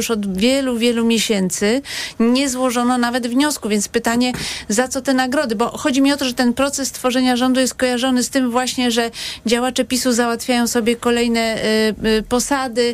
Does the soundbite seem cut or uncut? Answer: uncut